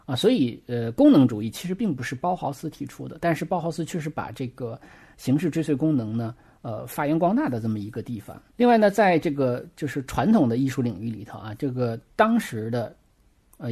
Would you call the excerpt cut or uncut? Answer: uncut